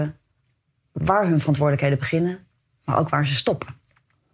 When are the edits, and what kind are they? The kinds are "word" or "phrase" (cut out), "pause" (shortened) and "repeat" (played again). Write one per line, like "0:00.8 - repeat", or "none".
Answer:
none